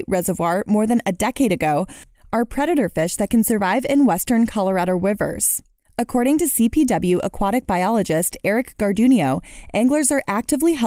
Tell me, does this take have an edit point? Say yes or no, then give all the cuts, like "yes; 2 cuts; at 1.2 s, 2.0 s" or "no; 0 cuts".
no; 0 cuts